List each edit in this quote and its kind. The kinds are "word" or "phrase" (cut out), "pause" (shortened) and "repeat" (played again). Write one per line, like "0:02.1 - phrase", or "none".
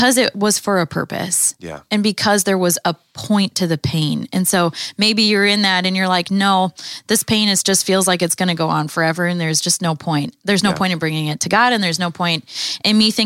none